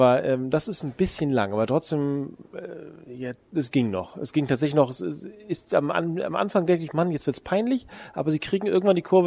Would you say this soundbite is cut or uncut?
uncut